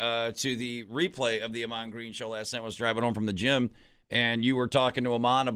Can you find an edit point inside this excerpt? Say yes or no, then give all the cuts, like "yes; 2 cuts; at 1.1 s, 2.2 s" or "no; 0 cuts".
no; 0 cuts